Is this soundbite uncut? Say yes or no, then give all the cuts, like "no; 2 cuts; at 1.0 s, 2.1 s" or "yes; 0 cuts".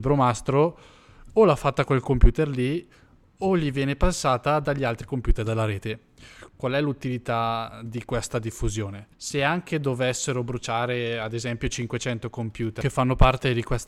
no; 1 cut; at 9.1 s